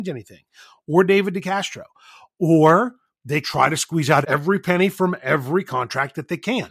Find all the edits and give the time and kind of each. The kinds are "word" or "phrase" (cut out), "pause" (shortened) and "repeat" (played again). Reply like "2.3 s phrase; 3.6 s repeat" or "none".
3.4 s word; 4.2 s word